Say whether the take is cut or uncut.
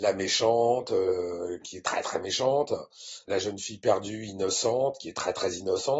uncut